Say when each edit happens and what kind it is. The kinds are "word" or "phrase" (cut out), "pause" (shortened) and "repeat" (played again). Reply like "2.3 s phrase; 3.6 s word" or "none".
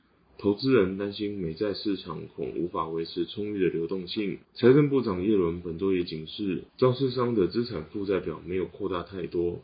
4.4 s pause; 6.7 s pause